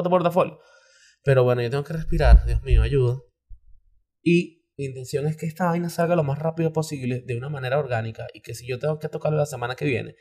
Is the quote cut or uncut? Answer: cut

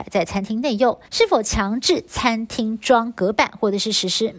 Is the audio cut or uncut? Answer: cut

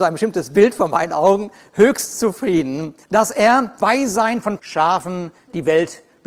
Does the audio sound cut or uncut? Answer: cut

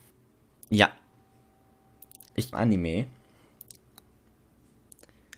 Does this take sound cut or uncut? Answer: cut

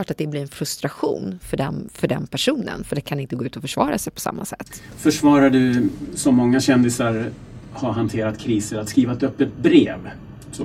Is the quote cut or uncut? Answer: uncut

